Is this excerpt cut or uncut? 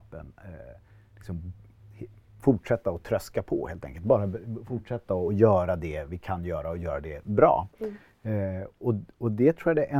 uncut